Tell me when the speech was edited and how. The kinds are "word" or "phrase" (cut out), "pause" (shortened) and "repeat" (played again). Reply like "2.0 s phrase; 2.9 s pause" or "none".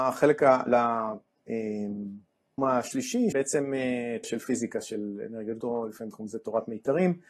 2.6 s word; 3.3 s word; 4.2 s word; 5.6 s word